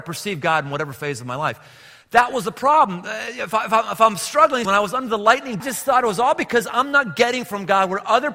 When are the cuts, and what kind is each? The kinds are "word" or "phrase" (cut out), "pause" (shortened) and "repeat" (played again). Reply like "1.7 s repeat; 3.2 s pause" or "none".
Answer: 4.6 s word; 5.6 s phrase